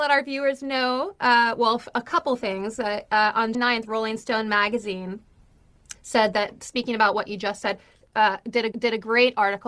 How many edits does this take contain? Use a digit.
3